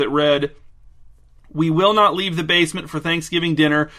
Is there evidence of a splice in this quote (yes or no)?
no